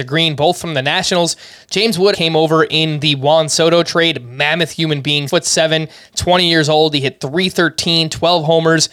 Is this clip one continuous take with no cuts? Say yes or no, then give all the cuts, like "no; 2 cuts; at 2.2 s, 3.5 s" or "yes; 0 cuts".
no; 2 cuts; at 2.1 s, 5.3 s